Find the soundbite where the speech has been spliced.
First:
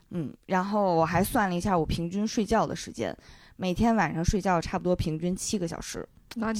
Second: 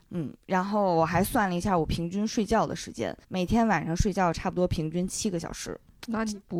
second; 1 cut; at 3.2 s

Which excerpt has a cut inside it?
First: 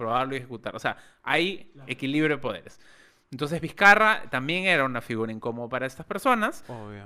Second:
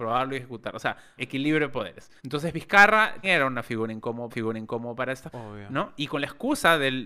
second; 5 cuts; at 1.2 s, 2.2 s, 3.2 s, 4.3 s, 5.3 s

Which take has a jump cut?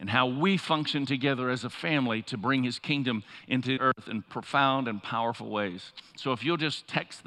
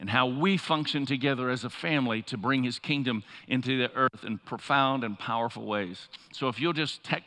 first; 1 cut; at 3.8 s

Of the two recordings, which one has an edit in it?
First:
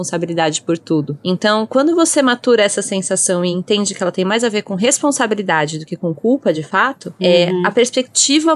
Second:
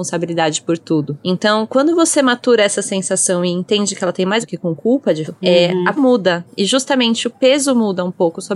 second; 3 cuts; at 4.4 s, 5.3 s, 6.0 s

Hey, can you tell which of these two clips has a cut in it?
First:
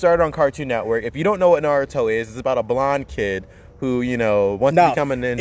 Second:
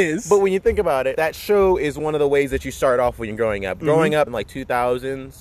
second; 2 cuts; at 1.1 s, 4.3 s

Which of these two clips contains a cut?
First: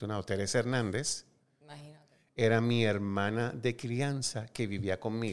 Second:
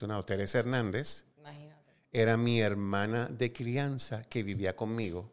second; 1 cut; at 1.3 s

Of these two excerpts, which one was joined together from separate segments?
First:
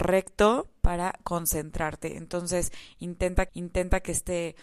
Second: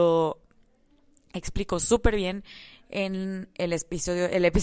first; 1 cut; at 3.5 s

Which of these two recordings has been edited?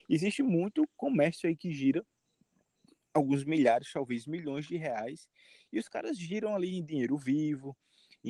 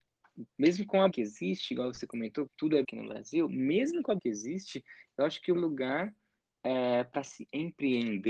second; 5 cuts; at 1.1 s, 2.5 s, 2.8 s, 4.2 s, 5.5 s

